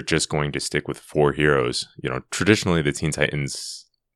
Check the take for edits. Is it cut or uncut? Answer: uncut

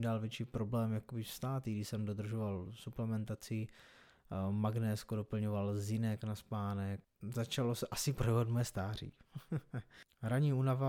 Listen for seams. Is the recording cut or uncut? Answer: uncut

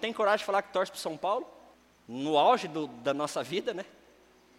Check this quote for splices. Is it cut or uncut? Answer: cut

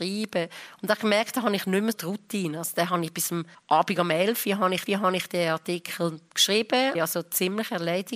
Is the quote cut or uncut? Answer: cut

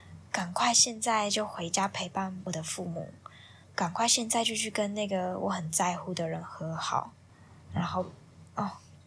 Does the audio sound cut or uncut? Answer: cut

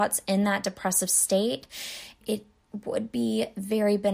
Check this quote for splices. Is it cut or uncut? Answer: cut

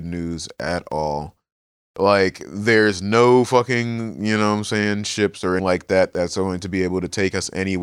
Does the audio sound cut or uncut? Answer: cut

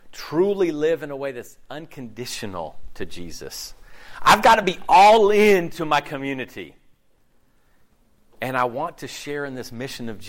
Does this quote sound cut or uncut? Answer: uncut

